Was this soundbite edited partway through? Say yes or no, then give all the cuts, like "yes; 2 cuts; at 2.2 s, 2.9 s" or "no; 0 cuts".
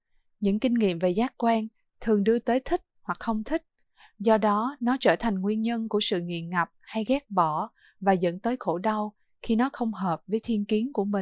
no; 0 cuts